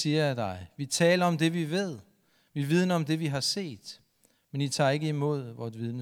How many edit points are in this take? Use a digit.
0